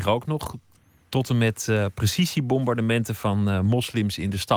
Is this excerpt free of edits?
yes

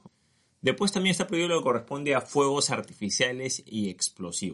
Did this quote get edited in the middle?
no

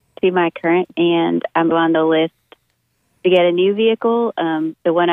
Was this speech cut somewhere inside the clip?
yes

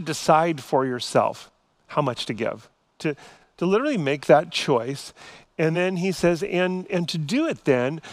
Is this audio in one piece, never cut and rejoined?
yes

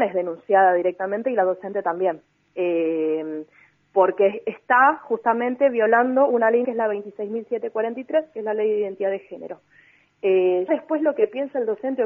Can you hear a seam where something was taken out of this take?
yes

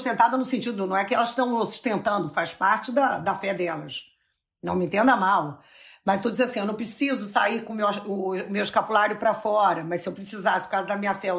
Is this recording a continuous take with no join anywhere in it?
yes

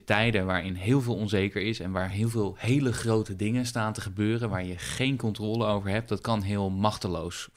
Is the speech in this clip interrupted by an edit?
no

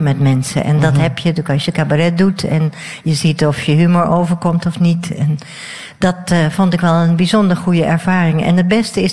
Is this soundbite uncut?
yes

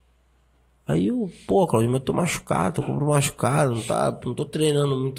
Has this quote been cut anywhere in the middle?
no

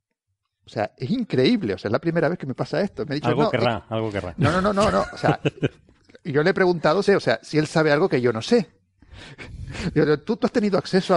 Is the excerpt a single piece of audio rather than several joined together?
no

